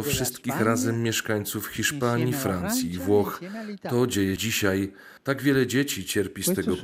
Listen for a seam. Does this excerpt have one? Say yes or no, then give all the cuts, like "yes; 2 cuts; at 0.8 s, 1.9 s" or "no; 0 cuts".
yes; 2 cuts; at 4.4 s, 5.2 s